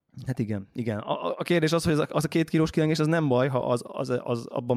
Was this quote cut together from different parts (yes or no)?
no